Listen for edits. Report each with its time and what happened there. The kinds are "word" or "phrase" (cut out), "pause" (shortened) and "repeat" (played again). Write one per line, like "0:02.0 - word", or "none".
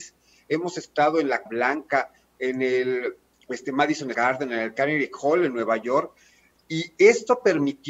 0:01.5 - word
0:03.3 - pause
0:04.1 - word